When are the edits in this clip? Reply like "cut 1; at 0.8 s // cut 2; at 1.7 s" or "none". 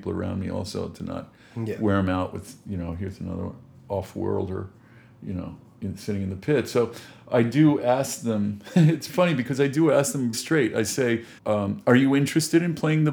cut 1; at 9.1 s // cut 2; at 10.3 s // cut 3; at 11.4 s